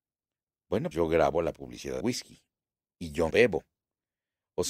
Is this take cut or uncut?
cut